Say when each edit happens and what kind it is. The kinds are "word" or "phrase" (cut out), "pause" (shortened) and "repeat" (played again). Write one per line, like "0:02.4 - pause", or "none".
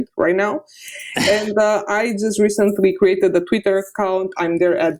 none